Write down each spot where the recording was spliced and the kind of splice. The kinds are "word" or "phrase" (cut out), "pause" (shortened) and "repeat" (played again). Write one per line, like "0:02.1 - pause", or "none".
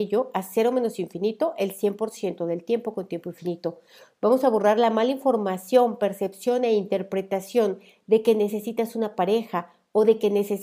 none